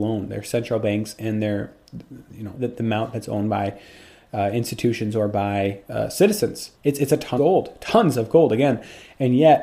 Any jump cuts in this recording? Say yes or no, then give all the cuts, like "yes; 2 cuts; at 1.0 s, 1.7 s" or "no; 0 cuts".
yes; 3 cuts; at 2.5 s, 6.7 s, 7.4 s